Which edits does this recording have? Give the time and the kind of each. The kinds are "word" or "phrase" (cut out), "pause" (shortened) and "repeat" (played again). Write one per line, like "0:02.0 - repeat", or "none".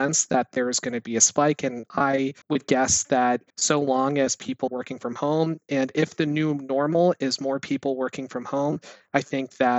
0:02.4 - pause
0:03.5 - pause
0:04.7 - word